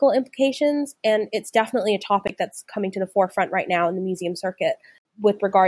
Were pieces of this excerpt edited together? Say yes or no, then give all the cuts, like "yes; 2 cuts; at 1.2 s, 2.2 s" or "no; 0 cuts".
no; 0 cuts